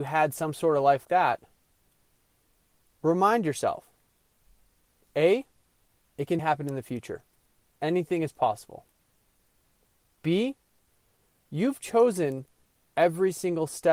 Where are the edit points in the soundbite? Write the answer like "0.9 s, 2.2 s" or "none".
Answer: 1.0 s, 6.4 s